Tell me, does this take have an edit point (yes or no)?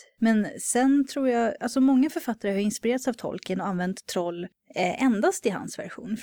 no